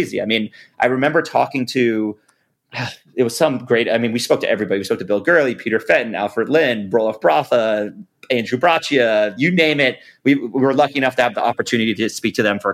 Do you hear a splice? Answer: no; 0 cuts

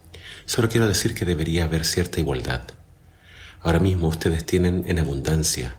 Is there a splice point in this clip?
no; 0 cuts

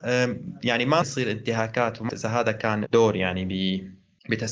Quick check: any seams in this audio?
yes; 3 cuts; at 1.0 s, 2.1 s, 2.9 s

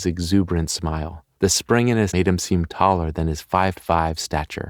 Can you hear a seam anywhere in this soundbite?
yes; 3 cuts; at 1.4 s, 2.1 s, 3.7 s

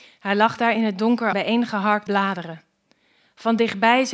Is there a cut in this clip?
yes; 2 cuts; at 1.3 s, 2.1 s

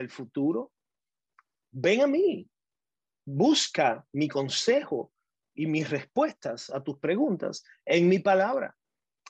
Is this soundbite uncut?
yes; 0 cuts

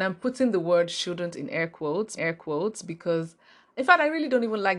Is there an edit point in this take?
yes; 1 cut; at 2.2 s

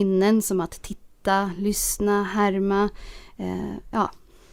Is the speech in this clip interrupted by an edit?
no; 0 cuts

